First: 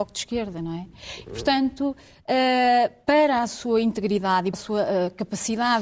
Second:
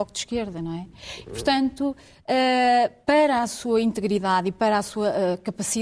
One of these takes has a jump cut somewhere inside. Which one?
first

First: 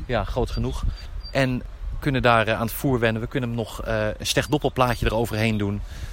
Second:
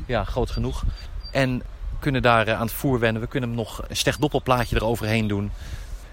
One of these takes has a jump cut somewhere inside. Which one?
second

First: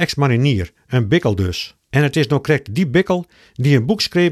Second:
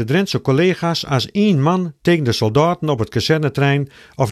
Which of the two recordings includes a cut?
first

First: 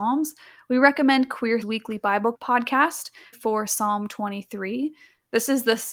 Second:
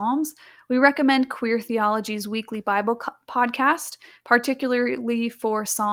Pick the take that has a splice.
first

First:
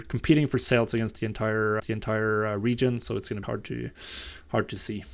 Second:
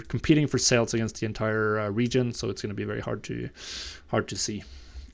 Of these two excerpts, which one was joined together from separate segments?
first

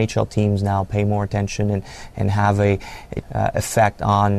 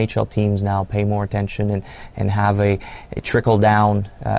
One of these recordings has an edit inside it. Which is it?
first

